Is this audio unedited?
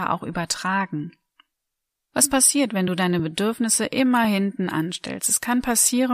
yes; 0 cuts

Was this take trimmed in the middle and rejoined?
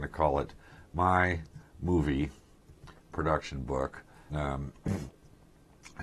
yes; 1 cut; at 4.3 s

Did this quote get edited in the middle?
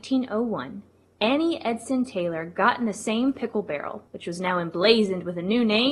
yes; 1 cut; at 4.1 s

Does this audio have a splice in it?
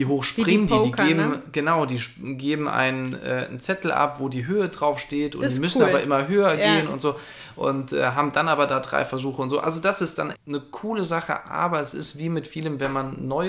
yes; 1 cut; at 10.3 s

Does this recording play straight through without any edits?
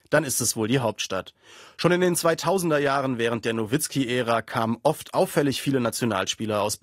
yes; 0 cuts

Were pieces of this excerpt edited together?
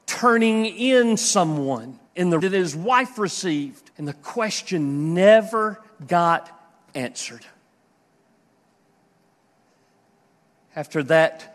yes; 3 cuts; at 2.1 s, 2.4 s, 3.9 s

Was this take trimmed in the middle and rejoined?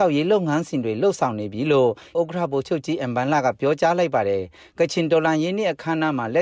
yes; 1 cut; at 2.1 s

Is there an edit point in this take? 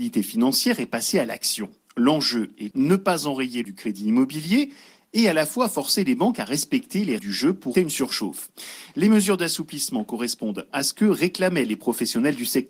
yes; 5 cuts; at 2.7 s, 3.6 s, 7.2 s, 7.7 s, 10.7 s

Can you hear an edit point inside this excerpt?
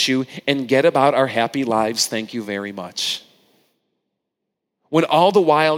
no; 0 cuts

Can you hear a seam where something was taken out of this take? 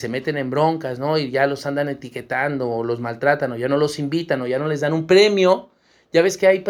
no; 0 cuts

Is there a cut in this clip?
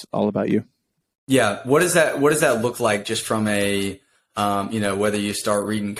no; 0 cuts

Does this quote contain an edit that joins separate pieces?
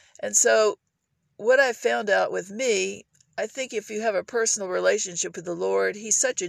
no; 0 cuts

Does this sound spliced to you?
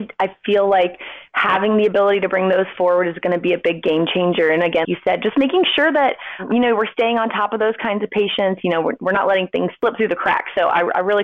yes; 1 cut; at 4.8 s

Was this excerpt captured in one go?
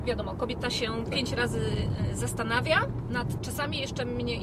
no; 1 cut; at 3.4 s

